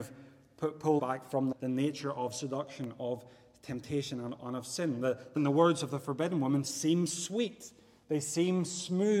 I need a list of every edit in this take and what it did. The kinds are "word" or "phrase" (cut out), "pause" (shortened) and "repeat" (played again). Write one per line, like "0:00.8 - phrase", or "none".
0:01.0 - phrase
0:01.5 - word
0:05.4 - phrase